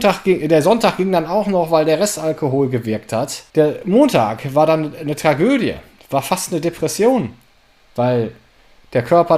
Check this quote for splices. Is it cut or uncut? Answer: uncut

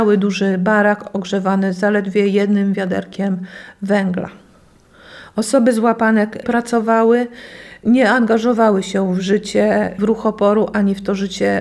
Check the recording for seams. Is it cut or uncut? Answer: cut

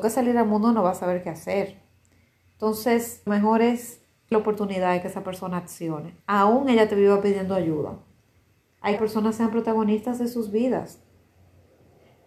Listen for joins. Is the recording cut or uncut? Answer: cut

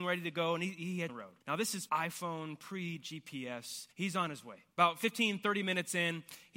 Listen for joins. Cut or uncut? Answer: cut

